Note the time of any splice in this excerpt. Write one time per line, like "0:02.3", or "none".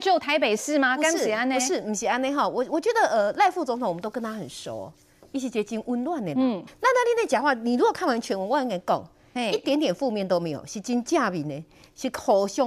0:06.7